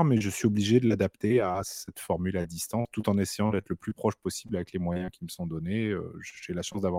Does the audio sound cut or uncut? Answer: uncut